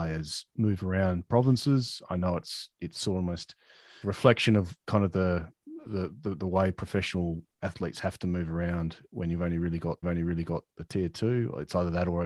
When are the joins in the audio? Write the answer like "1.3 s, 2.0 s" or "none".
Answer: 2.7 s, 4.0 s, 5.9 s, 10.0 s

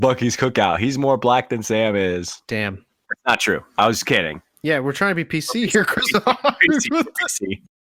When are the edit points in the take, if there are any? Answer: 2.4 s, 4.5 s

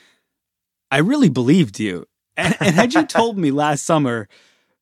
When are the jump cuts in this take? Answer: none

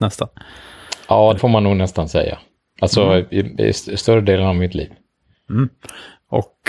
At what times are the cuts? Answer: 1.4 s

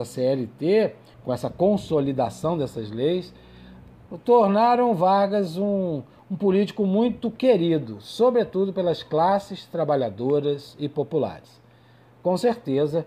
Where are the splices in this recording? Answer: 1.1 s

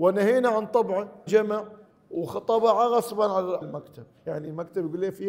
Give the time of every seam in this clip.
1.3 s, 1.9 s, 3.6 s

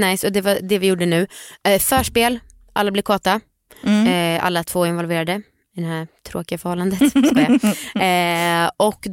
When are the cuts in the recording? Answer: none

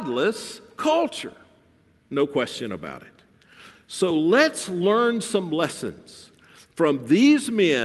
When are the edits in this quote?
none

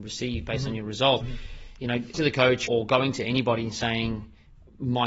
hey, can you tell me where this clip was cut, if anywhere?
1.2 s, 2.1 s, 2.7 s

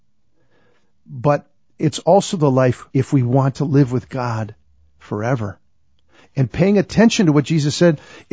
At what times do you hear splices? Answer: 2.9 s

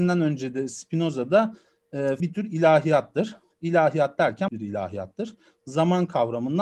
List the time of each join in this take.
2.2 s, 4.5 s

